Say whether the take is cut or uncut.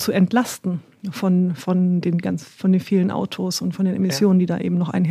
uncut